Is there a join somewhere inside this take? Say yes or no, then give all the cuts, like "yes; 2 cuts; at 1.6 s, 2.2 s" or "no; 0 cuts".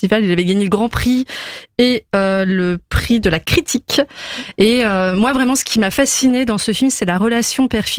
no; 0 cuts